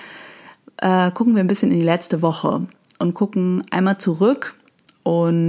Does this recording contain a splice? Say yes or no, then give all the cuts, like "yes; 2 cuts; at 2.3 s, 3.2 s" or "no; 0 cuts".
no; 0 cuts